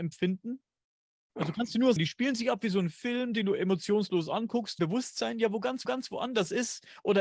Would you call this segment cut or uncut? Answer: cut